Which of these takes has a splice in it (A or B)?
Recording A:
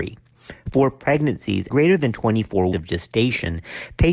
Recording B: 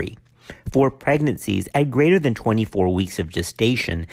A